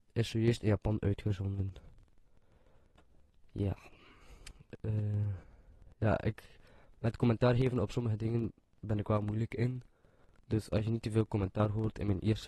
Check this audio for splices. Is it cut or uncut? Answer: uncut